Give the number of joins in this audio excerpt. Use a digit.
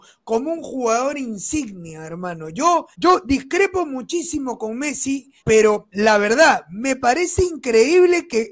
2